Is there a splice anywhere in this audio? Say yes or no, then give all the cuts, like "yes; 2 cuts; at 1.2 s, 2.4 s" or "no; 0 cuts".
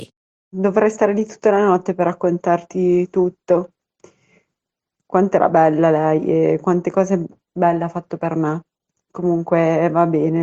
no; 0 cuts